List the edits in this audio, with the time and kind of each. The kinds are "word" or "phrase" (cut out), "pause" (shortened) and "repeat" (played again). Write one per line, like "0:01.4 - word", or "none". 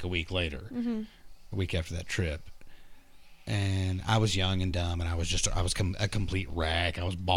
none